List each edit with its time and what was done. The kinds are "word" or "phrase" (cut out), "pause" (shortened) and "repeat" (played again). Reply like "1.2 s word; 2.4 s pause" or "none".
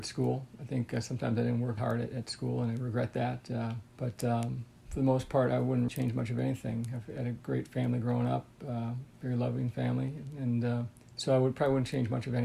1.8 s word; 3.9 s pause; 5.9 s word; 9.1 s pause; 11.0 s pause